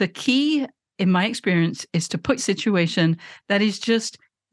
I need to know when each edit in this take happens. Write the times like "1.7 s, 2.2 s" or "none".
2.4 s